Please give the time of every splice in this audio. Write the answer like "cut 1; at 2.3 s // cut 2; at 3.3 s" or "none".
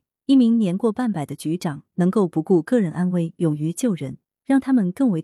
none